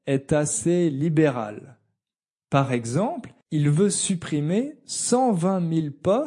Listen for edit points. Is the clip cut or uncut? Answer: cut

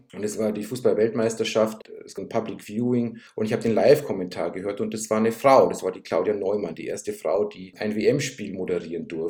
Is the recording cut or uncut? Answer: cut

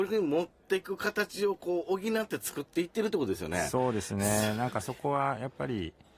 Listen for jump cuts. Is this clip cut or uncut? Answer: uncut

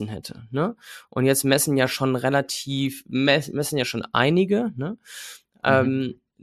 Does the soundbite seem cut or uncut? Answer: uncut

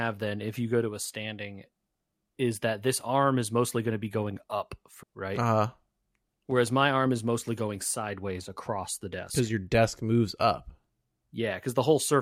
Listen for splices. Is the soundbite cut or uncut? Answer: cut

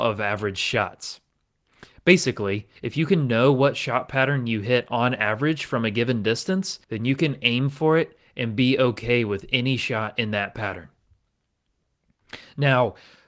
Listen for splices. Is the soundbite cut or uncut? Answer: cut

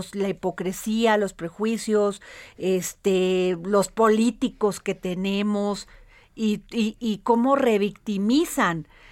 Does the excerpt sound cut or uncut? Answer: uncut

